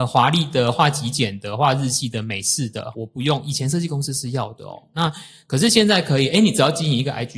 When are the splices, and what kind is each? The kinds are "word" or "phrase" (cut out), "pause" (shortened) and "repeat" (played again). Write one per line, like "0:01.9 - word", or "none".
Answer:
0:02.9 - word